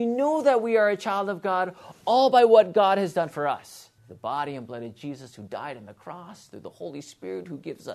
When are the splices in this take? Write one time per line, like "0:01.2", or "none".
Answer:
0:04.0